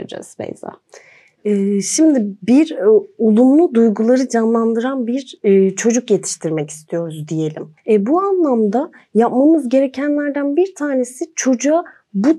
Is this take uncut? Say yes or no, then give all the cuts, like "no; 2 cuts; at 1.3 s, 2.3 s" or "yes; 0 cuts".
no; 1 cut; at 7.8 s